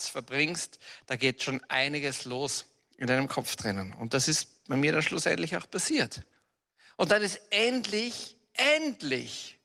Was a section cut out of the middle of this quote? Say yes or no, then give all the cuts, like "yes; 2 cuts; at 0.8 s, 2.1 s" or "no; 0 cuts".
no; 0 cuts